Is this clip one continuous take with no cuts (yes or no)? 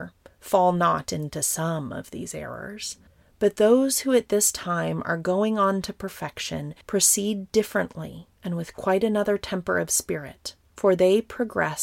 no